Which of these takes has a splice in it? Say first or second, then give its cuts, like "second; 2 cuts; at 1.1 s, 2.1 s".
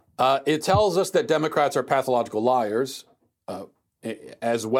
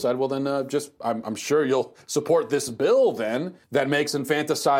second; 2 cuts; at 2.0 s, 3.6 s